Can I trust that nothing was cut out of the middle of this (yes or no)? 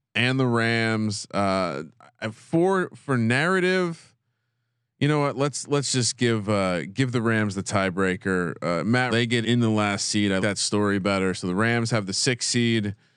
no